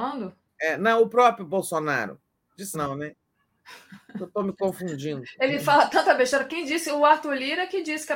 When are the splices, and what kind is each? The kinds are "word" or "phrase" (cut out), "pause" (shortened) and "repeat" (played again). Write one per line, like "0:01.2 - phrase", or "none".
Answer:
0:02.7 - word